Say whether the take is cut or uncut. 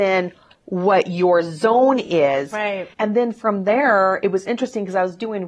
cut